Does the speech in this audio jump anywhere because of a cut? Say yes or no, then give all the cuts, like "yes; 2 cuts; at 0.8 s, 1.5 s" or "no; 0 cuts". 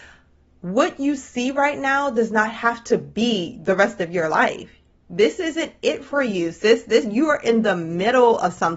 no; 0 cuts